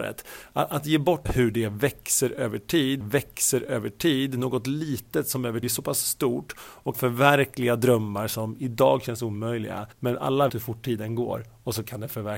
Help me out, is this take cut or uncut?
cut